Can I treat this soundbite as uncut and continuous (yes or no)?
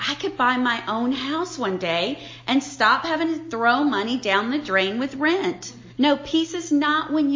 no